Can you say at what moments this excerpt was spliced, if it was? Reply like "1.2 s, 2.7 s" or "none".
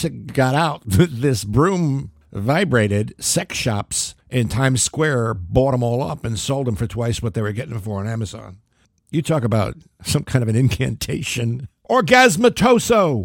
none